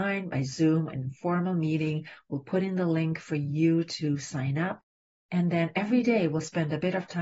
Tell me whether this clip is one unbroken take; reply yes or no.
yes